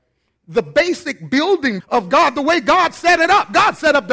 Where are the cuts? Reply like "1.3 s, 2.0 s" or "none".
1.8 s